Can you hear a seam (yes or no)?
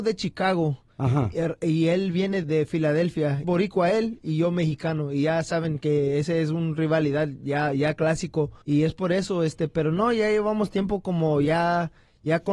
yes